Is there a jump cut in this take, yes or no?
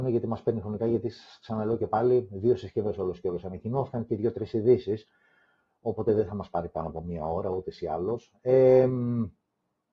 no